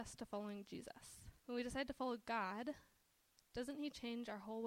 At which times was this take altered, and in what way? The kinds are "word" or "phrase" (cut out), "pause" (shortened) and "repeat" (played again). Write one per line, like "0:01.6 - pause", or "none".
0:01.4 - pause